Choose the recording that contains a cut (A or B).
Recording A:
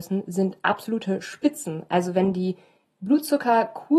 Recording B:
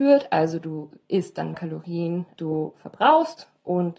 B